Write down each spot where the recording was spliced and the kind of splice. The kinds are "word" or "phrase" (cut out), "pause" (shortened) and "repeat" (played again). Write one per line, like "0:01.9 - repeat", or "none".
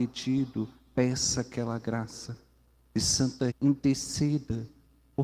0:03.5 - word

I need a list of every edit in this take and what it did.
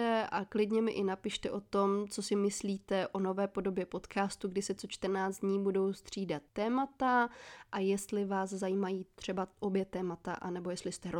0:06.5 - pause

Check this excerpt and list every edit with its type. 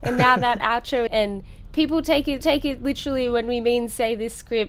0:01.1 - phrase
0:02.4 - repeat

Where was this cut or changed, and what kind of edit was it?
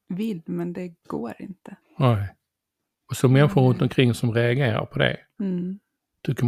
0:01.8 - pause

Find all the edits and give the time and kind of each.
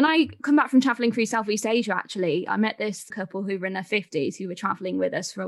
0:03.1 - word

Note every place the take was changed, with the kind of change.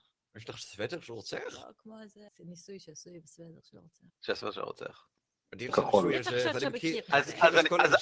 0:02.3 - pause
0:04.1 - pause
0:05.7 - phrase

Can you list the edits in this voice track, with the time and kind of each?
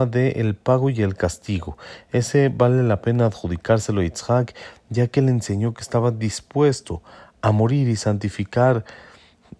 none

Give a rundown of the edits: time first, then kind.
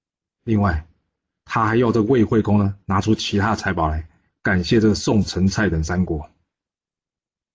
none

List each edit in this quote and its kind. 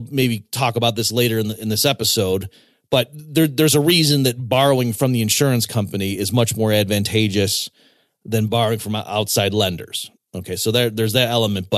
none

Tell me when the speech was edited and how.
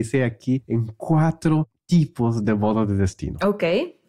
none

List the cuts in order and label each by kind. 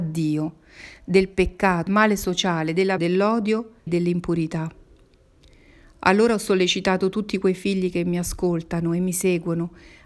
0:01.9 - word
0:03.0 - word
0:03.9 - word

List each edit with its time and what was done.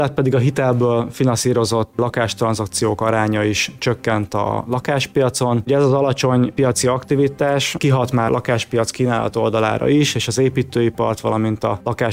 0:08.3 - word

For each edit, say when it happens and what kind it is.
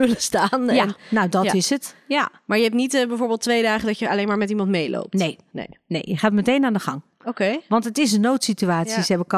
none

